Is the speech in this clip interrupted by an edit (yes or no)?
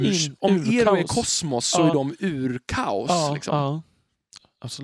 no